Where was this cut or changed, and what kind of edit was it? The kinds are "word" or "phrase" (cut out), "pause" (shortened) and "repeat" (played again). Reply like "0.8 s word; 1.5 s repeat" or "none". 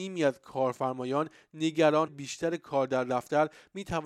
2.1 s phrase